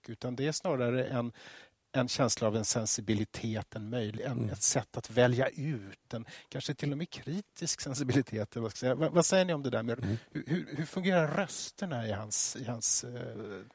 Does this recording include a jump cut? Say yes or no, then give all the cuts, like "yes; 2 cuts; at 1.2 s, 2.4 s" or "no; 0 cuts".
no; 0 cuts